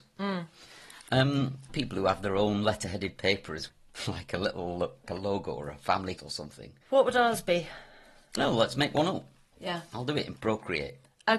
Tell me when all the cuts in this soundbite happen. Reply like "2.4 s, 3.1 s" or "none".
1.7 s, 3.7 s, 5.1 s, 6.2 s, 6.8 s, 8.4 s